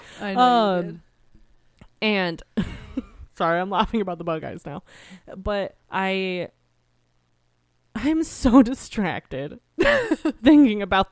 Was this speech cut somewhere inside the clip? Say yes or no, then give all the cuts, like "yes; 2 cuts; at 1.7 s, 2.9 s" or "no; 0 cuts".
no; 0 cuts